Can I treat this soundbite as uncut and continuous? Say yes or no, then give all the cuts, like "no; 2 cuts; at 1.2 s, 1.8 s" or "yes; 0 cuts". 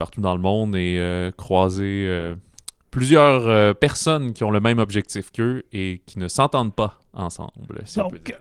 yes; 0 cuts